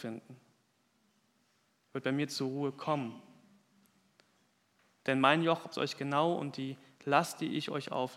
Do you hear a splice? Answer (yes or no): yes